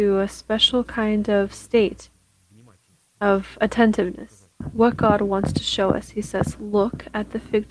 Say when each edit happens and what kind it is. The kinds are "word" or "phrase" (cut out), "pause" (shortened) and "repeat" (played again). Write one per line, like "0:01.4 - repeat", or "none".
none